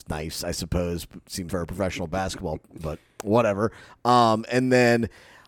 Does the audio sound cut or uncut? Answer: cut